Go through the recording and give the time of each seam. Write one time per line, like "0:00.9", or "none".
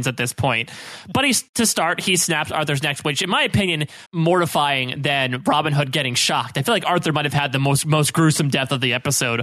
0:04.1